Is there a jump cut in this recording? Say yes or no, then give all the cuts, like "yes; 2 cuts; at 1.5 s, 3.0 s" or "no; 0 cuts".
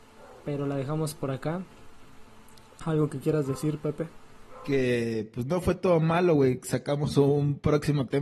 no; 0 cuts